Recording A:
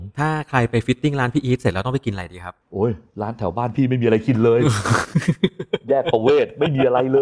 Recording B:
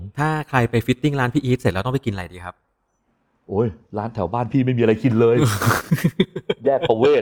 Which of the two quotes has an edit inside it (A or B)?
A